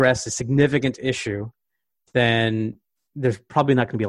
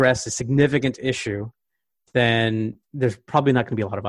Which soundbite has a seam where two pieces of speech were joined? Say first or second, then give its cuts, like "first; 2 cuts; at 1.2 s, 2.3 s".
second; 1 cut; at 2.8 s